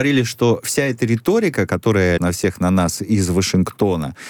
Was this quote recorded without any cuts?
no; 1 cut; at 2.2 s

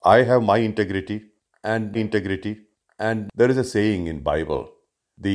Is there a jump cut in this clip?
yes; 1 cut; at 1.9 s

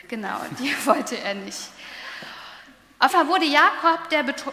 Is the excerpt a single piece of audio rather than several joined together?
no; 1 cut; at 3.1 s

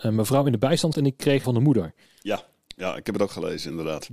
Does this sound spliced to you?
yes; 3 cuts; at 0.9 s, 1.4 s, 2.1 s

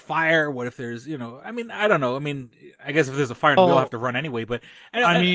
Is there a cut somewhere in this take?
yes; 1 cut; at 3.6 s

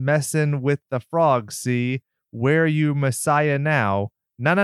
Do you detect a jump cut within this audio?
no; 0 cuts

